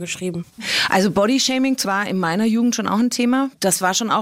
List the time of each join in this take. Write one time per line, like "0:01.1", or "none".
0:01.8

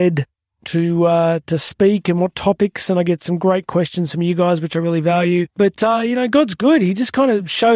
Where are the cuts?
0:05.5

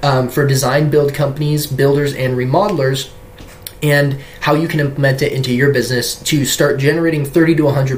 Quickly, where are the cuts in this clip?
none

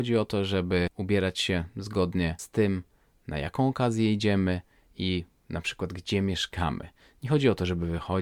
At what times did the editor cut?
none

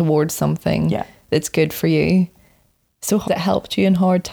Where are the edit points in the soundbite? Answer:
0:03.3

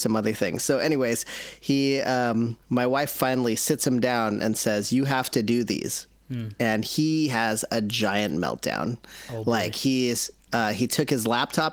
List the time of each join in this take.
0:02.6

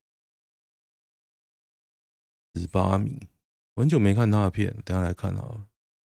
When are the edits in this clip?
0:03.5

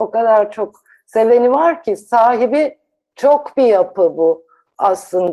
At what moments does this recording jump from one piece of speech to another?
none

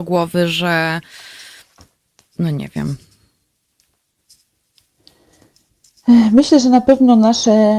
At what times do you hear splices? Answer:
none

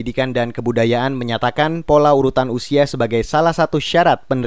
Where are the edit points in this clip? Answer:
none

